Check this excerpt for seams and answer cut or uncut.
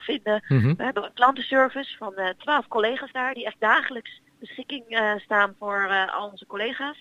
cut